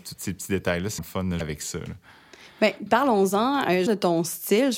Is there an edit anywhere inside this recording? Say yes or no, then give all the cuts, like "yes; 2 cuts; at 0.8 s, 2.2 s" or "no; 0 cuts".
yes; 4 cuts; at 1.0 s, 1.4 s, 2.9 s, 3.9 s